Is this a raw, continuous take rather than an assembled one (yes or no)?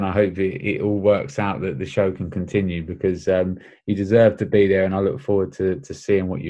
yes